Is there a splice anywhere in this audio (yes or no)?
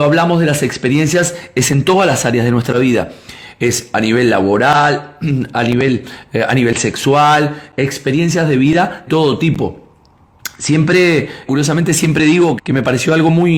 yes